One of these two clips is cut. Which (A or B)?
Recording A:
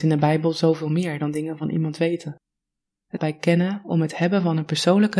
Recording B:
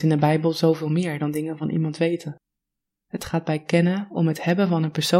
A